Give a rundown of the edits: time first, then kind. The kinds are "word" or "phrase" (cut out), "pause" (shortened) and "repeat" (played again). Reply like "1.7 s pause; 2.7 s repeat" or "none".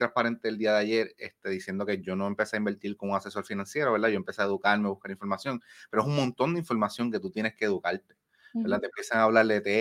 none